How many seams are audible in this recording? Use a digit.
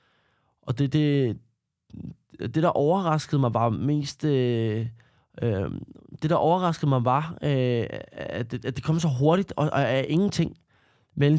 0